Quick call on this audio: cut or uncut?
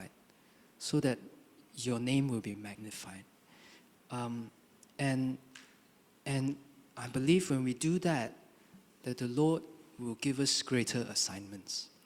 uncut